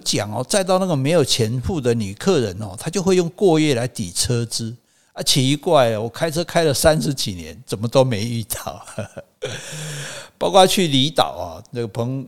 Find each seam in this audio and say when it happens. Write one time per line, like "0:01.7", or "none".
none

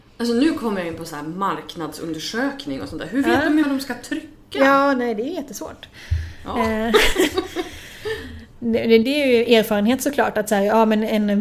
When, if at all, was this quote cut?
0:03.6

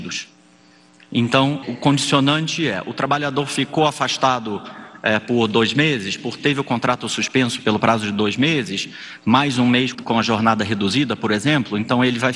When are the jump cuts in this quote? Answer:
0:01.6
0:06.4
0:09.9

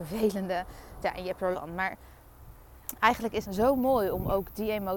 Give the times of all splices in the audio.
0:01.0
0:01.5
0:03.4

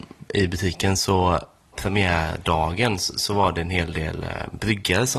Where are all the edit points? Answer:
0:01.7

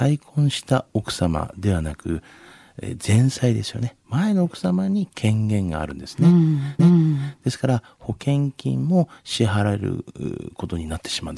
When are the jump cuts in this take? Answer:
0:06.8

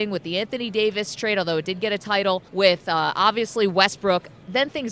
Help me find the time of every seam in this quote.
0:02.5

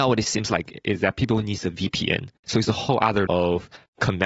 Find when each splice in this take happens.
0:02.4
0:03.3

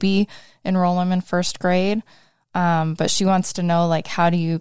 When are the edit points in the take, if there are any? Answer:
none

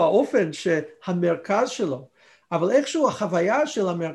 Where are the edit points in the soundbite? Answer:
none

